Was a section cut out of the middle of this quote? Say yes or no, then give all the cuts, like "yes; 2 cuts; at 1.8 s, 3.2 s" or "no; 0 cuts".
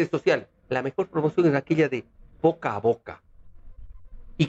no; 0 cuts